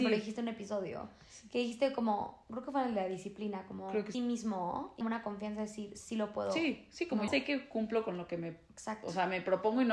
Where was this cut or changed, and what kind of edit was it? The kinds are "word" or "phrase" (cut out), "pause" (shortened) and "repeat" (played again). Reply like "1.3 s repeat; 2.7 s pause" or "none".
4.1 s phrase; 5.0 s phrase; 7.3 s word